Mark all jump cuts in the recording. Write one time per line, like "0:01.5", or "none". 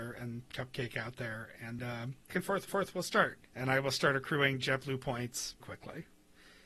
0:01.8
0:02.3
0:02.7
0:03.5
0:05.6